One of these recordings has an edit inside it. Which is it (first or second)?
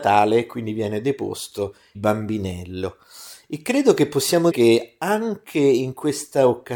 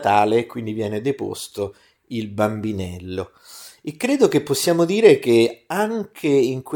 first